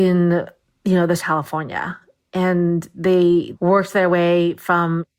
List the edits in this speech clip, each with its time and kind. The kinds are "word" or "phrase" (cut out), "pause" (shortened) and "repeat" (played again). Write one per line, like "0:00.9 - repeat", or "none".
0:01.2 - phrase